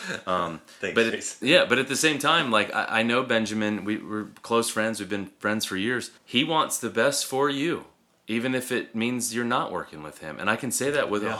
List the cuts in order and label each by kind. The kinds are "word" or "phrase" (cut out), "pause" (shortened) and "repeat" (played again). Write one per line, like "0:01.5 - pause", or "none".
0:06.2 - pause